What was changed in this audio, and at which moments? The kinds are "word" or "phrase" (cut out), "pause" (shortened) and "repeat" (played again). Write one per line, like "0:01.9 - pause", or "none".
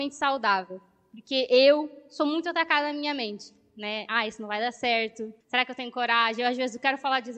0:05.4 - pause